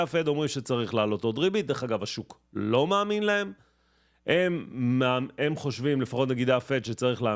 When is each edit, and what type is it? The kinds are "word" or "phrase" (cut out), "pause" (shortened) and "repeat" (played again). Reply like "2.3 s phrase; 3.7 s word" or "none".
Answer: none